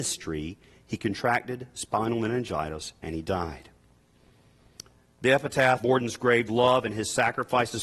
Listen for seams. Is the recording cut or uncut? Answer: cut